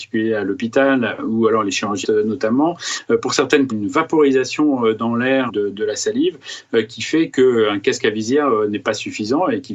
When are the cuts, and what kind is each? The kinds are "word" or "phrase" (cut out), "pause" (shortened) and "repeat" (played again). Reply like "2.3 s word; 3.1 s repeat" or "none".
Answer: 2.0 s word; 3.7 s phrase; 5.5 s word